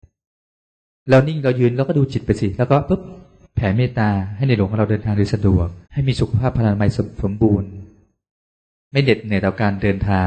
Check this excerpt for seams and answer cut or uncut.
cut